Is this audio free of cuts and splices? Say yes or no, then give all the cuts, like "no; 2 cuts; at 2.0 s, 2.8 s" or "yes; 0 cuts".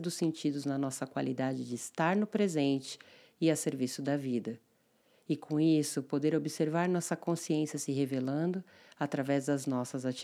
yes; 0 cuts